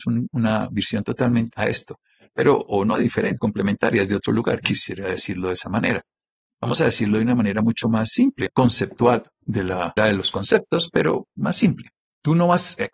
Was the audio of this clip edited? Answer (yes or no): yes